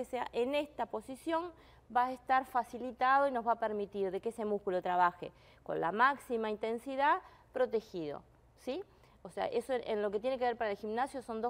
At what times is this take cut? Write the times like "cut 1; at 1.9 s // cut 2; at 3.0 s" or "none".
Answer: none